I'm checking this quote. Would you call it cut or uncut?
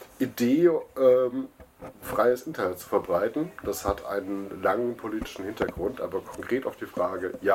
uncut